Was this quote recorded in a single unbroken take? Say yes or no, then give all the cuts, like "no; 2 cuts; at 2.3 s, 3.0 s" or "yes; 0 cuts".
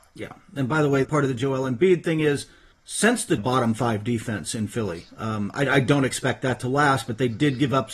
no; 3 cuts; at 1.0 s, 2.7 s, 3.4 s